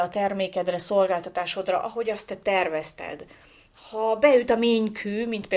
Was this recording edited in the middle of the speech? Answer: no; 0 cuts

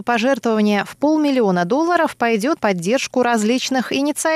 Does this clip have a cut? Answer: yes; 1 cut; at 2.6 s

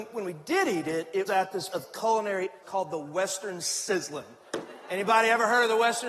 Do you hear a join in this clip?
yes; 3 cuts; at 1.3 s, 1.7 s, 2.6 s

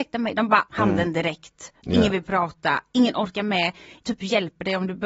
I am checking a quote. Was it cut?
yes; 1 cut; at 4.0 s

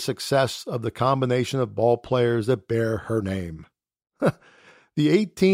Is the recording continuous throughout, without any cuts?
yes; 0 cuts

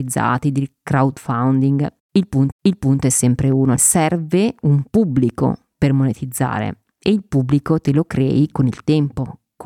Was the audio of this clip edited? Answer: yes; 2 cuts; at 2.5 s, 3.8 s

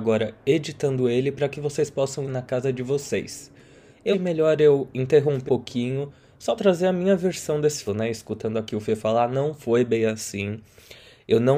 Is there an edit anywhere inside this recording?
yes; 5 cuts; at 2.2 s, 4.1 s, 5.5 s, 6.6 s, 7.9 s

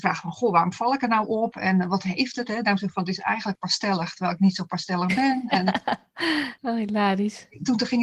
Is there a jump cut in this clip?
no; 0 cuts

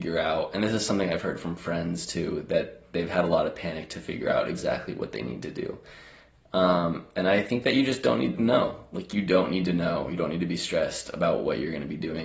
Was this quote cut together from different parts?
no; 0 cuts

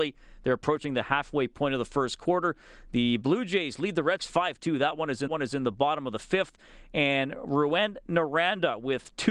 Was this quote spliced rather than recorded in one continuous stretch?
yes; 2 cuts; at 4.2 s, 5.3 s

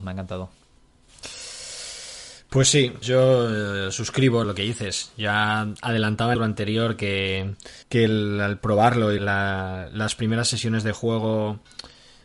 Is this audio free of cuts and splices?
no; 5 cuts; at 3.0 s, 4.4 s, 6.4 s, 7.8 s, 9.2 s

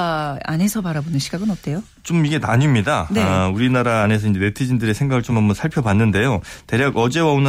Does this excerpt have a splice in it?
no; 0 cuts

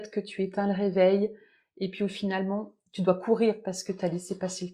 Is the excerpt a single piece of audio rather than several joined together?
yes; 0 cuts

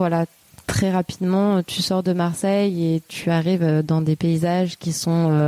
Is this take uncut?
yes; 0 cuts

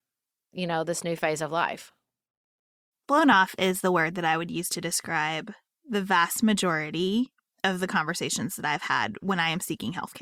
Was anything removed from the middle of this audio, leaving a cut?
no; 0 cuts

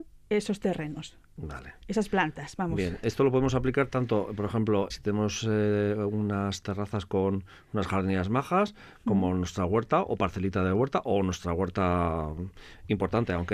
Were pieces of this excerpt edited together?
yes; 1 cut; at 4.9 s

